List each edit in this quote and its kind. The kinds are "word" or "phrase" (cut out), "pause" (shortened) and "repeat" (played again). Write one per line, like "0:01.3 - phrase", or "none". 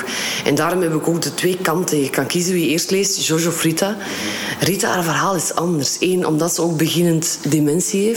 none